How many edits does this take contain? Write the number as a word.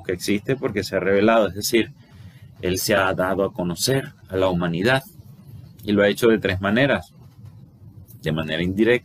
zero